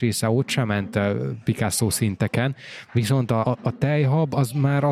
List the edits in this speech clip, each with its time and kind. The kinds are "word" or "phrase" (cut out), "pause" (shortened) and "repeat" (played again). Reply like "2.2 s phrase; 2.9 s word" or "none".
3.4 s word